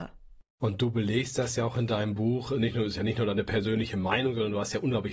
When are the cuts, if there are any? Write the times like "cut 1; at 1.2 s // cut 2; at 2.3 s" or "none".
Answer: none